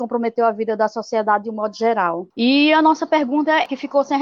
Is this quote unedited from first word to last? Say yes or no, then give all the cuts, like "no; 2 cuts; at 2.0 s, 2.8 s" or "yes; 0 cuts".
yes; 0 cuts